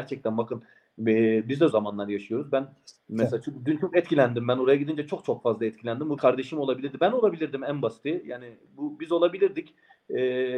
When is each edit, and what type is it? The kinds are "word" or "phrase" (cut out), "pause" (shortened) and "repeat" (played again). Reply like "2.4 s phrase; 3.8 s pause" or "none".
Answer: 1.7 s word; 6.2 s word